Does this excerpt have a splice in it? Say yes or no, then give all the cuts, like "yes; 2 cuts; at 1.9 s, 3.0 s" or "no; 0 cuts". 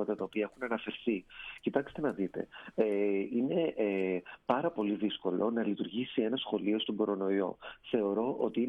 no; 0 cuts